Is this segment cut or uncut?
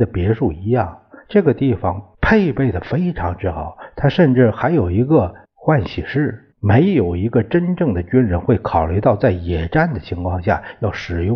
cut